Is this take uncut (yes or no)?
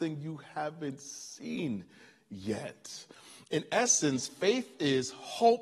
yes